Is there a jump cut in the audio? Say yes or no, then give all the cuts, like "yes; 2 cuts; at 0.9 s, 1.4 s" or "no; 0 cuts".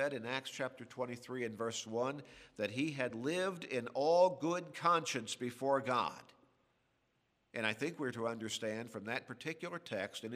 no; 0 cuts